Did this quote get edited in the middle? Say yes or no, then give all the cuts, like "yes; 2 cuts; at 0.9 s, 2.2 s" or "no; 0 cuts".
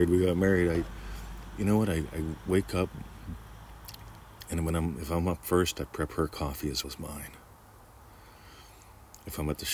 yes; 1 cut; at 6.8 s